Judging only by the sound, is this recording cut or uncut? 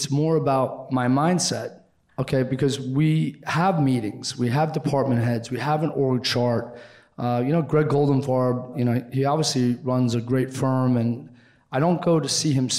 uncut